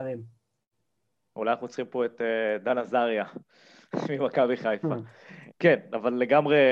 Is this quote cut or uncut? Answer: cut